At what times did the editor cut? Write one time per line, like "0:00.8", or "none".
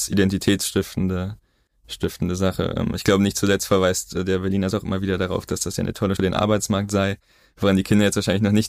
0:04.7
0:06.2